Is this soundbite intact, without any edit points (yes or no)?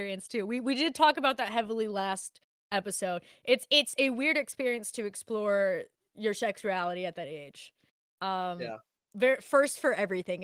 yes